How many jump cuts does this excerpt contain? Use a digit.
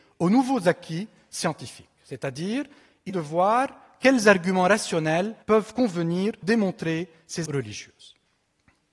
4